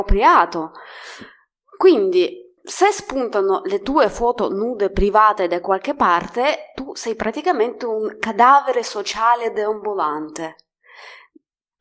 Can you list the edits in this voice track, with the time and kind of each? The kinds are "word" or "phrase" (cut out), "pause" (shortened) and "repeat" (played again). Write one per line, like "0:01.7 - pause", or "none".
0:02.6 - pause

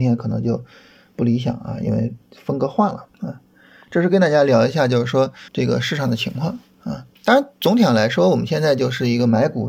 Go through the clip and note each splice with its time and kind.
0:02.2 - pause
0:03.1 - pause
0:05.5 - pause
0:07.2 - pause

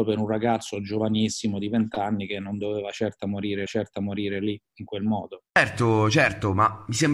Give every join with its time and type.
0:03.7 - repeat
0:05.5 - pause

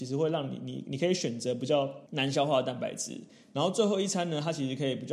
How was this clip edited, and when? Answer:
none

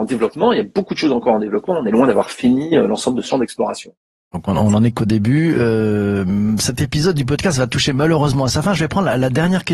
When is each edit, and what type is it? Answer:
0:03.3 - word

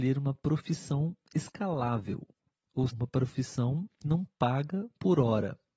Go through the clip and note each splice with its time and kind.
0:02.9 - word
0:04.0 - word

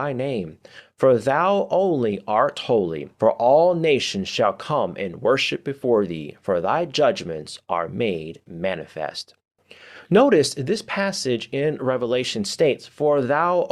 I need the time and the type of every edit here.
0:03.1 - pause

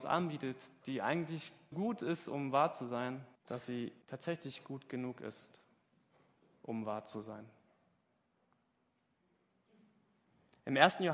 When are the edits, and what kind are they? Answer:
0:01.7 - word
0:03.4 - pause
0:04.0 - pause

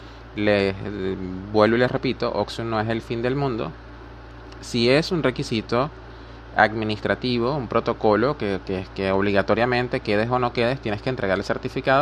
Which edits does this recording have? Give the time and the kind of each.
none

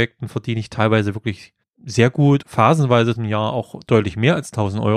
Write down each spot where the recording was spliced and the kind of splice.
0:01.6 - pause
0:02.4 - word
0:03.1 - word

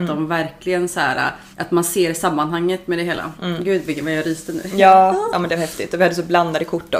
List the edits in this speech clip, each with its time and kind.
0:01.5 - pause

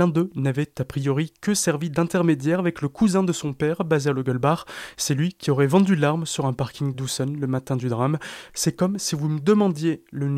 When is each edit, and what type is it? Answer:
none

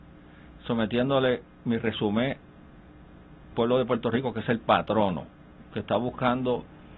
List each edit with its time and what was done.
0:03.5 - word

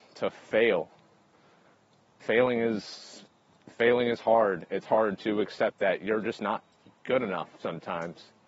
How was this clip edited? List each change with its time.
none

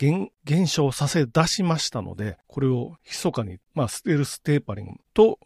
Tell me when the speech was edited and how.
none

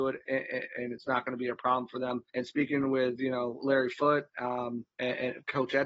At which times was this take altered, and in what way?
0:02.3 - pause
0:04.9 - pause

